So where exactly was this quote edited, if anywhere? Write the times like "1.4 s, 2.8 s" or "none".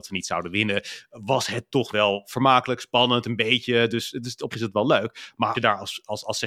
1.9 s, 4.5 s, 5.5 s